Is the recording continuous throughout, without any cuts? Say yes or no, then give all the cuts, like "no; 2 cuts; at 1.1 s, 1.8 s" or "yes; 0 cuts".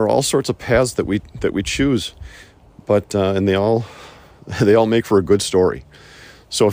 yes; 0 cuts